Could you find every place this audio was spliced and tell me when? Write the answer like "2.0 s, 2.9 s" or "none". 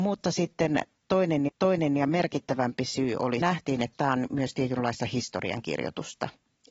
1.5 s, 3.4 s

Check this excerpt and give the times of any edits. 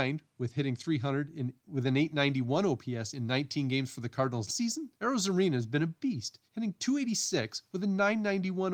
1.6 s, 4.5 s, 5.0 s, 6.5 s

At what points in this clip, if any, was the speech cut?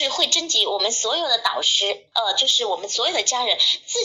none

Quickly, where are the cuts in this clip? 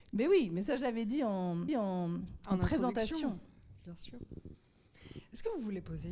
1.7 s

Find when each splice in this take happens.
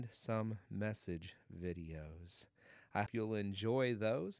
3.1 s

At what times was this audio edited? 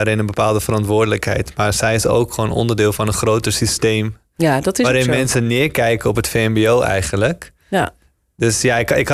none

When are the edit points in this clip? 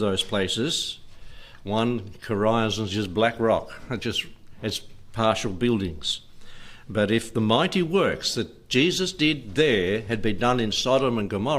none

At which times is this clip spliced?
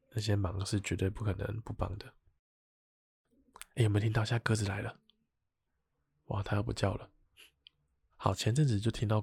5.7 s

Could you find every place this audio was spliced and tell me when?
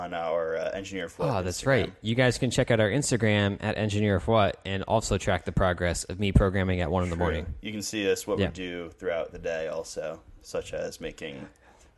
none

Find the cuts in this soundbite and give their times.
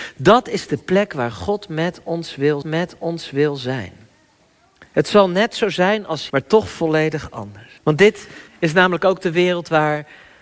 2.6 s, 6.3 s, 7.8 s, 8.5 s

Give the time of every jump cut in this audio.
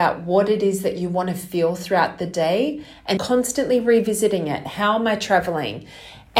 3.2 s

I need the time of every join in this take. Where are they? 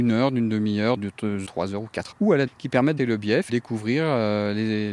1.0 s, 1.4 s, 2.1 s, 2.5 s, 3.0 s, 3.5 s

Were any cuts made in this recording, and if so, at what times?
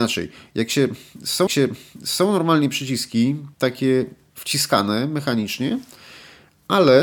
1.5 s, 3.5 s

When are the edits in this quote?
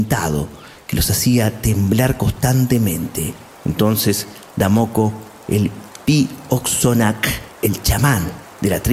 3.5 s, 7.5 s

